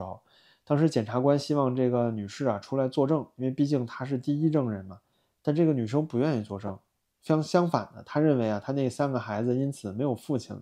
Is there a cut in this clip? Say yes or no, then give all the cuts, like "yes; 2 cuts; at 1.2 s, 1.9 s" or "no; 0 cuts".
no; 0 cuts